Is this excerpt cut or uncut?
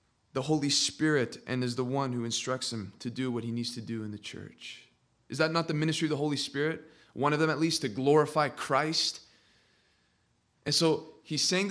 uncut